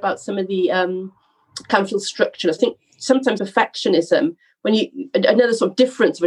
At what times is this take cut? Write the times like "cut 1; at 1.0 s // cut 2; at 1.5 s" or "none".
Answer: cut 1; at 2.6 s // cut 2; at 3.4 s